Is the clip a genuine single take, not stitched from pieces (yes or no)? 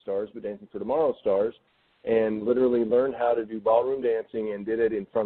yes